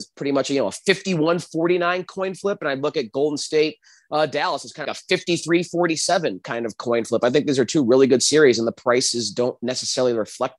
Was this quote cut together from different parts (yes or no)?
yes